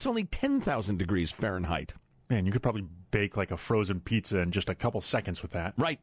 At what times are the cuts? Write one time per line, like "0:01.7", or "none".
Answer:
none